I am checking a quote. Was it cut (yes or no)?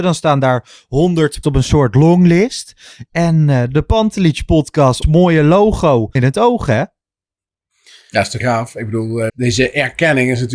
yes